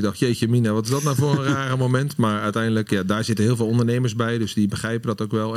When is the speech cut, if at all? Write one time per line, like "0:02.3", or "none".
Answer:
none